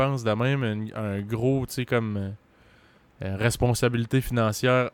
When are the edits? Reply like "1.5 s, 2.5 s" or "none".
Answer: none